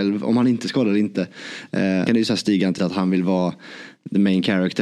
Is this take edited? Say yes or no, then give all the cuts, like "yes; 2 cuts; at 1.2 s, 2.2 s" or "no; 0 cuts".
yes; 2 cuts; at 2.1 s, 2.8 s